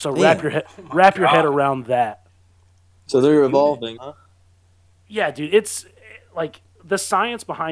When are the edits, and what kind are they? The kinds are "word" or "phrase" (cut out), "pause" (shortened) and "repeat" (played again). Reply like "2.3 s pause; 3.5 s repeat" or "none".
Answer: 2.6 s pause; 4.0 s word